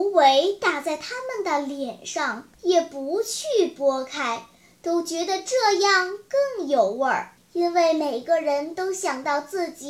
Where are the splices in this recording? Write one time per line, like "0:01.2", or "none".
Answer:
0:02.5
0:07.4